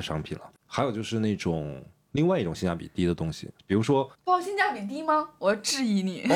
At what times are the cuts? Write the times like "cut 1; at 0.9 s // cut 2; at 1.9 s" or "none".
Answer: cut 1; at 3.6 s // cut 2; at 4.1 s

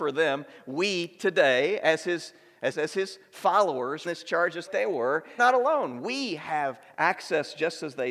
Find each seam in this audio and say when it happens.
cut 1; at 2.7 s // cut 2; at 4.0 s // cut 3; at 4.7 s // cut 4; at 5.4 s

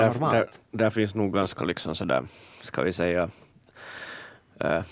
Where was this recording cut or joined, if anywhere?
none

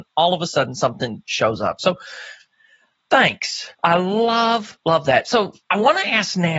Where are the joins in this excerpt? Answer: cut 1; at 3.7 s // cut 2; at 4.8 s // cut 3; at 5.6 s

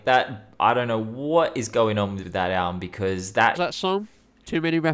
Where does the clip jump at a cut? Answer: cut 1; at 2.2 s // cut 2; at 3.5 s

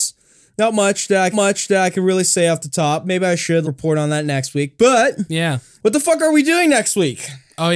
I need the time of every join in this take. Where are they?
cut 1; at 1.3 s // cut 2; at 3.6 s

